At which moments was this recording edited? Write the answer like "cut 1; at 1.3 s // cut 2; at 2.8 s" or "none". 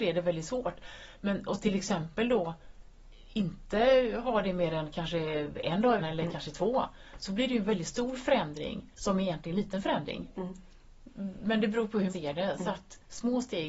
cut 1; at 6.0 s // cut 2; at 8.9 s // cut 3; at 9.5 s // cut 4; at 12.1 s